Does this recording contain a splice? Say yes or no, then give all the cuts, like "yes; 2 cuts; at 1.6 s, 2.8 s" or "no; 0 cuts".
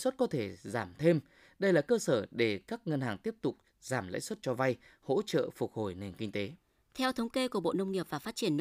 no; 0 cuts